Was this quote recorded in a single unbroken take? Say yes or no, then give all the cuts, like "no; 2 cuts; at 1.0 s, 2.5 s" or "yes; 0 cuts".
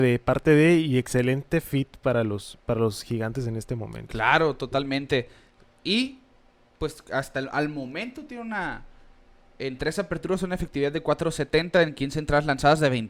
yes; 0 cuts